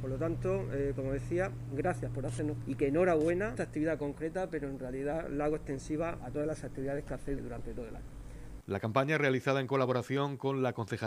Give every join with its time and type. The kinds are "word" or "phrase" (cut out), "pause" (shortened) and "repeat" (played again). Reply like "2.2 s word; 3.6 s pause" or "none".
2.6 s word; 3.6 s phrase; 6.2 s word; 7.4 s word